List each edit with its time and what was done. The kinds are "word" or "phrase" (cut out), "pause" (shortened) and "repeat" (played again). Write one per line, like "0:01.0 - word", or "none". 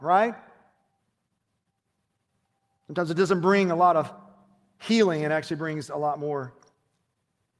none